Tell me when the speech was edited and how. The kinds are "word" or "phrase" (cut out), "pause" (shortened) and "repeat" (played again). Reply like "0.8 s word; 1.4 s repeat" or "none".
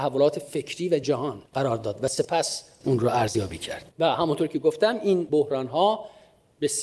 1.0 s word; 1.5 s pause; 3.9 s pause

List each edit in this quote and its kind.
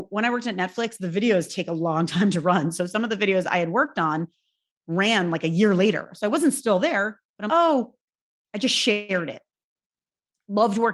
7.5 s word

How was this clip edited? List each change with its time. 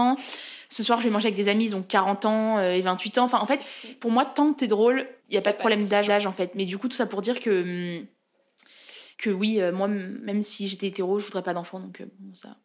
5.2 s pause; 6.1 s repeat; 9.1 s pause

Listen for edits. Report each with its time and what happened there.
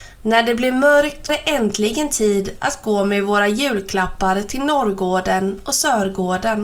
1.3 s word

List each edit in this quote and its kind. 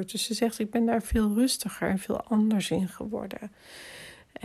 none

